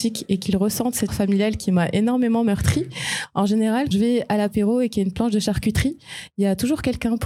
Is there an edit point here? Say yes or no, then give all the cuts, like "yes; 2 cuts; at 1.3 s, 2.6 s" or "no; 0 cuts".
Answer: yes; 2 cuts; at 1.1 s, 3.9 s